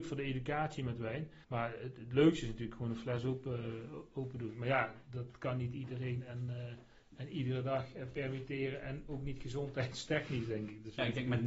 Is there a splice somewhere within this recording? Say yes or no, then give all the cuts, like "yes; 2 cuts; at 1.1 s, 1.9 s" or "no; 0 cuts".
yes; 1 cut; at 1.4 s